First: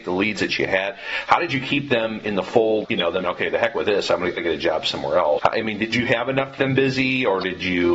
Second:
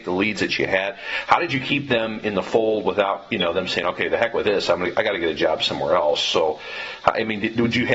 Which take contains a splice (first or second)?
first